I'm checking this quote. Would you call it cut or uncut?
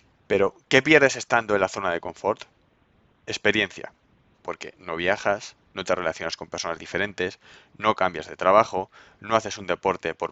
uncut